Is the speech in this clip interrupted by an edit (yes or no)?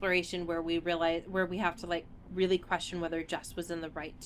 no